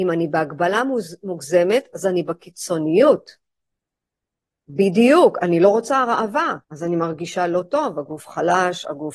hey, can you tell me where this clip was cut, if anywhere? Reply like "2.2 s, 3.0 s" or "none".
6.6 s